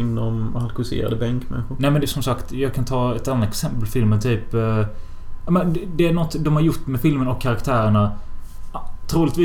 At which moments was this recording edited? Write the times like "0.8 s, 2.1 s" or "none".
2.0 s